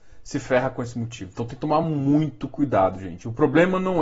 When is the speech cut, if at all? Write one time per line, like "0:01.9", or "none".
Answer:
none